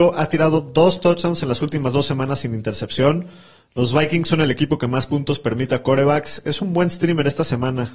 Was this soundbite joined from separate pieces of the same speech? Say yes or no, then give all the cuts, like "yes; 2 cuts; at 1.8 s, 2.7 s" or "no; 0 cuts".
no; 0 cuts